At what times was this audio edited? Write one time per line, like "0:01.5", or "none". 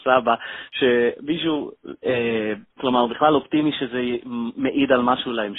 0:02.7